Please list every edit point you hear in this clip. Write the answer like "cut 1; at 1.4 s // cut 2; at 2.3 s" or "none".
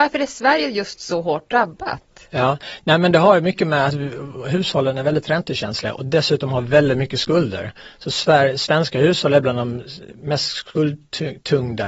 none